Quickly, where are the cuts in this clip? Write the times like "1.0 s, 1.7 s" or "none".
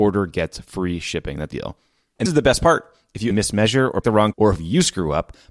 1.5 s, 2.3 s, 3.3 s, 4.0 s, 4.3 s

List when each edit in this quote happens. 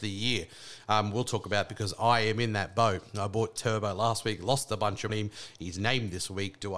1.7 s, 5.1 s

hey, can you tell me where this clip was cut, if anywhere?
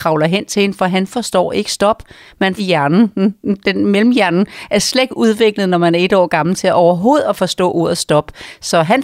2.6 s

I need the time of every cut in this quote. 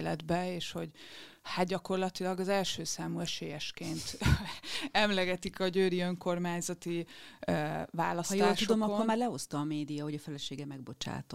none

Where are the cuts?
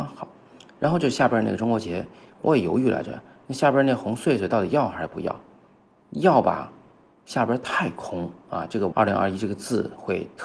8.9 s

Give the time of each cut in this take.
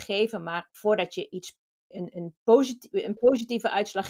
none

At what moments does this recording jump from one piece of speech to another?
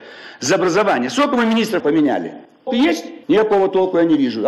1.8 s, 2.7 s, 3.2 s

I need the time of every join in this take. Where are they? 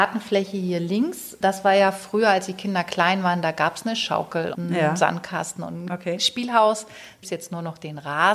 1.4 s, 4.5 s, 7.2 s

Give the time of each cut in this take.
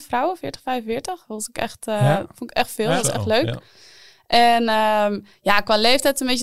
none

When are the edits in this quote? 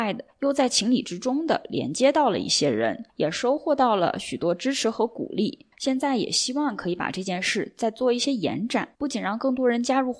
3.1 s, 5.7 s, 8.9 s

